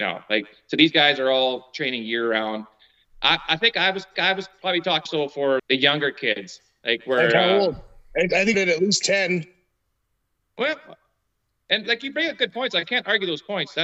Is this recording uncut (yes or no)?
no